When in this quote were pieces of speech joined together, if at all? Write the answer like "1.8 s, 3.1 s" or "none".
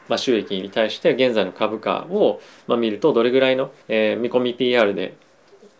3.8 s